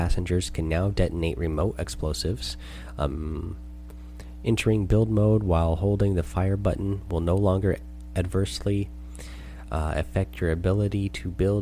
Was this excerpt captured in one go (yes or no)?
yes